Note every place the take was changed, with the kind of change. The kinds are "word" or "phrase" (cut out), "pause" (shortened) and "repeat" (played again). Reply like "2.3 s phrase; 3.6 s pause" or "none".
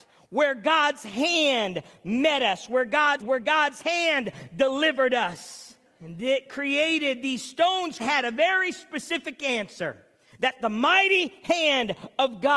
3.2 s phrase; 5.9 s pause; 8.0 s phrase